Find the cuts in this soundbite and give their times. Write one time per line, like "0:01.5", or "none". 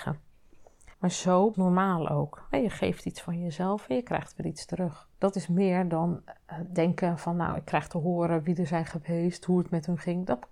0:00.9
0:01.5
0:05.1